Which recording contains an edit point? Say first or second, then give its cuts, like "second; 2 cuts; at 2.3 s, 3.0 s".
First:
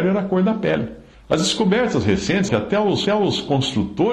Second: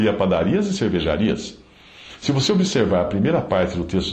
first; 3 cuts; at 1.1 s, 2.5 s, 3.1 s